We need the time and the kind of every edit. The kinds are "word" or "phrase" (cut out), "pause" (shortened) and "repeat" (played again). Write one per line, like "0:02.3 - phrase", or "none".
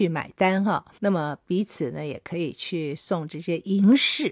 0:01.0 - pause